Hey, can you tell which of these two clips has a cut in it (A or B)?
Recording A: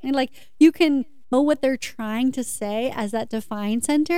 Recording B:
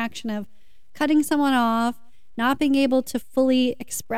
A